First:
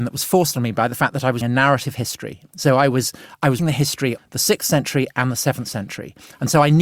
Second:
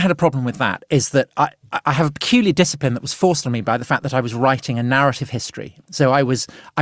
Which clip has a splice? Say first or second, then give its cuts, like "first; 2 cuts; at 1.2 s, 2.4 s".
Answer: first; 3 cuts; at 1.4 s, 3.6 s, 4.2 s